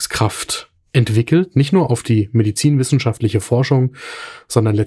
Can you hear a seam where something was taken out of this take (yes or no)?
no